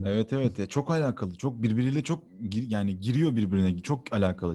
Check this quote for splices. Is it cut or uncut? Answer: uncut